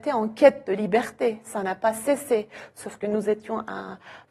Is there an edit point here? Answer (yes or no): no